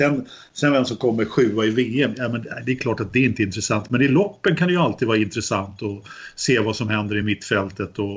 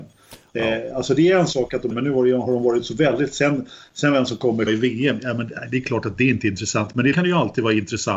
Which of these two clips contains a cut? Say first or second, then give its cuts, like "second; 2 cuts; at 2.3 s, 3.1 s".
second; 3 cuts; at 1.9 s, 4.7 s, 7.1 s